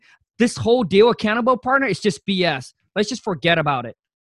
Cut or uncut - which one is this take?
uncut